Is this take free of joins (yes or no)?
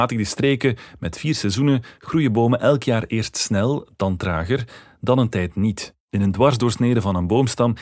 no